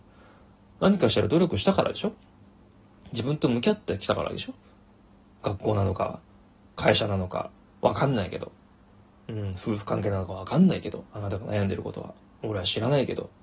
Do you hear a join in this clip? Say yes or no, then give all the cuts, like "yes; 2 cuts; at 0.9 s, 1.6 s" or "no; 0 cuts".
no; 0 cuts